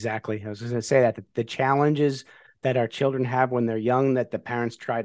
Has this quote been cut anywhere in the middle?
no; 0 cuts

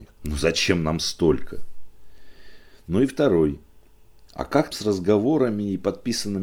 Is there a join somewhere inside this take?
yes; 1 cut; at 4.7 s

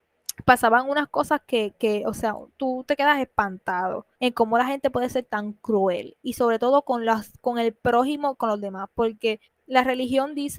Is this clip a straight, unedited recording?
no; 2 cuts; at 4.1 s, 9.4 s

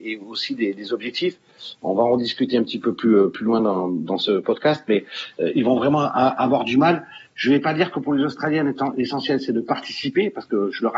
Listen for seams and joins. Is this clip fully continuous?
yes; 0 cuts

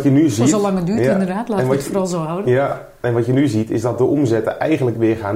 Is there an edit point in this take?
no; 0 cuts

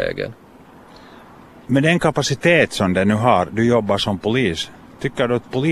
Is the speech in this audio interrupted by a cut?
yes; 1 cut; at 1.6 s

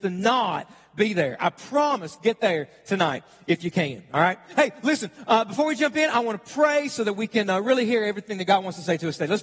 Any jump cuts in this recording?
no; 0 cuts

